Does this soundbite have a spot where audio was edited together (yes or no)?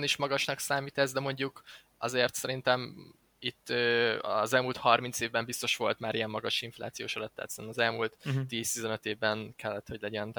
no